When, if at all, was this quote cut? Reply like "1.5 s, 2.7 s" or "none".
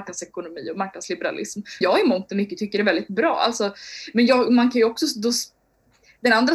1.8 s